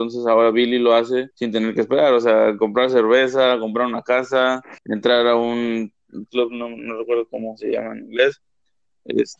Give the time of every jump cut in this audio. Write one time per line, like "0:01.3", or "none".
0:01.3
0:04.8
0:06.3